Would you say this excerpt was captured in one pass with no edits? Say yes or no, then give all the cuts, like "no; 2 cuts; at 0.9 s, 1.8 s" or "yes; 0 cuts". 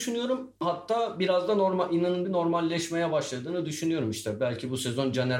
no; 1 cut; at 2.2 s